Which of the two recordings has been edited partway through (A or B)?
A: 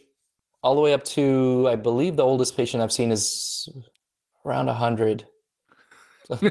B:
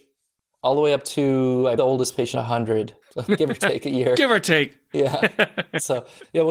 B